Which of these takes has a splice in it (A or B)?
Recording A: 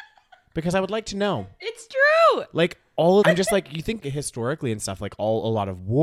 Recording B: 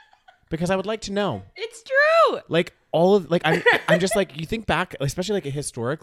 A